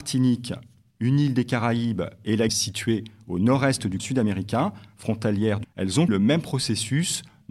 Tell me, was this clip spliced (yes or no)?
yes